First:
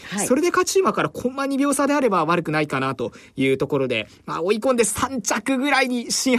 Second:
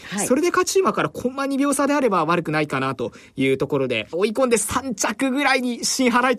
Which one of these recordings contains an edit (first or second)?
second